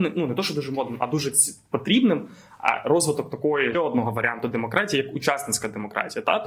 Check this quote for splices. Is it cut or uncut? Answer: cut